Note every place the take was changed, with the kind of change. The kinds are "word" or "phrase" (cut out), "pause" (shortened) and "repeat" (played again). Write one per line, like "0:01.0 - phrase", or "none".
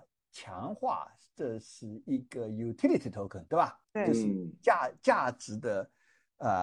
0:03.8 - pause